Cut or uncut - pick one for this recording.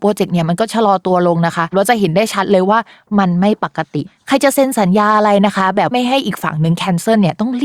uncut